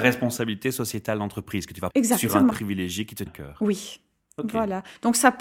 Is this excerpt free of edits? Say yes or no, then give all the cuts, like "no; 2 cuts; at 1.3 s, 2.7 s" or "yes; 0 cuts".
no; 3 cuts; at 1.9 s, 2.5 s, 3.3 s